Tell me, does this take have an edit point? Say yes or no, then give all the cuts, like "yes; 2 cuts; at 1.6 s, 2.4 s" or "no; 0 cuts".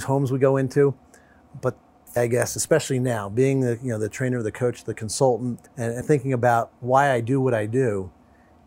yes; 4 cuts; at 2.2 s, 5.7 s, 6.0 s, 6.8 s